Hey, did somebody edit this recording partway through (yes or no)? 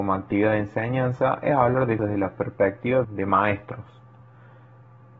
yes